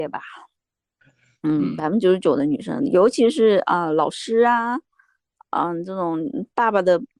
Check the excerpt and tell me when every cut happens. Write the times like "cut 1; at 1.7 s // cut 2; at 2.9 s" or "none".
none